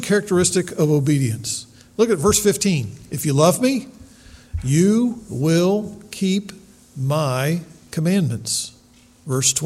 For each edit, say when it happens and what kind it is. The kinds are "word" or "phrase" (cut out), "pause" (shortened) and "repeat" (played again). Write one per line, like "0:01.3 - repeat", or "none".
none